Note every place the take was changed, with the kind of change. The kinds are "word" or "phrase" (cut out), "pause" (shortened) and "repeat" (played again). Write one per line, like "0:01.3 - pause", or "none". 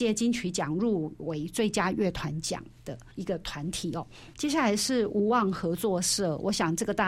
0:03.1 - pause